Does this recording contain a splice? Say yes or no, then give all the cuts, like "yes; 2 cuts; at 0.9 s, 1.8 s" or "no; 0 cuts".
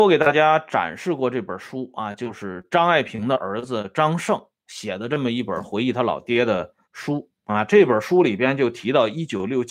yes; 1 cut; at 6.8 s